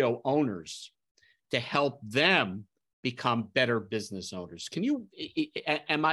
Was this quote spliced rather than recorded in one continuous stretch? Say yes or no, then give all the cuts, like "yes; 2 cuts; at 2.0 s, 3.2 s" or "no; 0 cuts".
no; 0 cuts